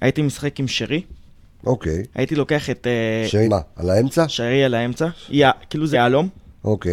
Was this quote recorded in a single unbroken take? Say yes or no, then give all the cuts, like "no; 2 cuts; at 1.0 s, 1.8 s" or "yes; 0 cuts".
no; 3 cuts; at 2.1 s, 3.4 s, 5.9 s